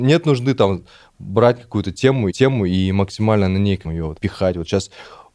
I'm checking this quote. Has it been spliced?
yes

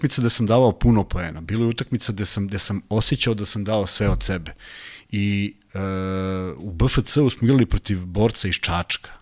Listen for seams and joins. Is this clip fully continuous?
yes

